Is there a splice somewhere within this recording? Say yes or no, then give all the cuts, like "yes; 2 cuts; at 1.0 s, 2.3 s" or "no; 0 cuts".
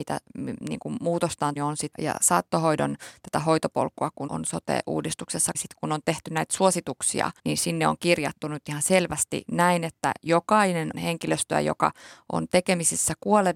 yes; 6 cuts; at 1.6 s, 1.9 s, 4.3 s, 5.5 s, 7.4 s, 10.9 s